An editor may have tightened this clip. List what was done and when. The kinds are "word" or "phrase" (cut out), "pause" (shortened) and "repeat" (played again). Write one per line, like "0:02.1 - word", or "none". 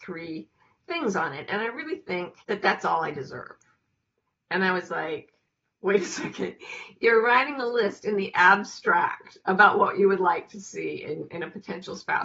0:02.4 - pause